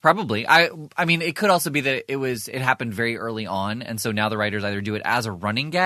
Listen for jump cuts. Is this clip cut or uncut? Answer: uncut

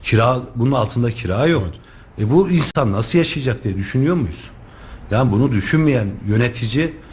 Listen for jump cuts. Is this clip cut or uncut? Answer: uncut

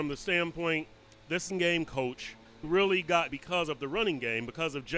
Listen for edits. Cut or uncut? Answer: cut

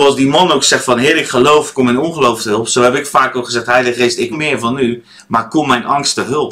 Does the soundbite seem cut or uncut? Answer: cut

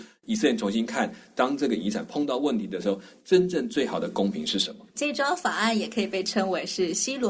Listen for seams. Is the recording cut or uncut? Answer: cut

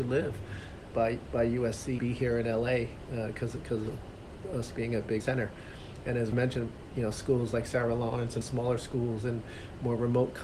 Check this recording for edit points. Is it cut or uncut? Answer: cut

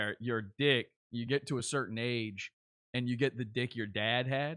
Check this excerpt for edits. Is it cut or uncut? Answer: uncut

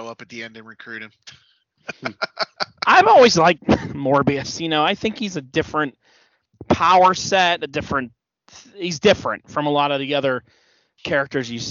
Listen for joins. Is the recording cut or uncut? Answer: uncut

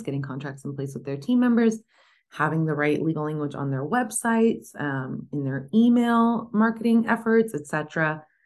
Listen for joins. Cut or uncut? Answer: uncut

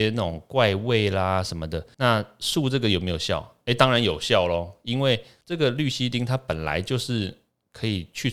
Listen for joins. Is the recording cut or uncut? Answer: uncut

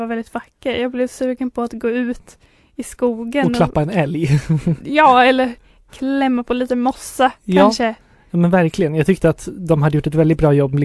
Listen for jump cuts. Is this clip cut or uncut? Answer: uncut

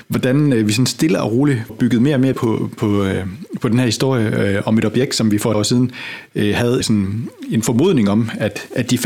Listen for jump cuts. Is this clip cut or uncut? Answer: cut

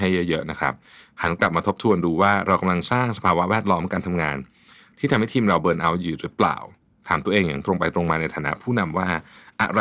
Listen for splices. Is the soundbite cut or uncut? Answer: uncut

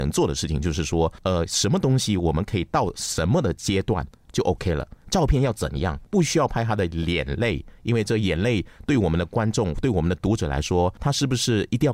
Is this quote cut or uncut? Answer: uncut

